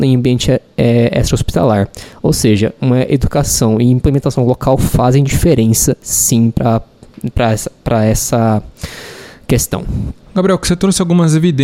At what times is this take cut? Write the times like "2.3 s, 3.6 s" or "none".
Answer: none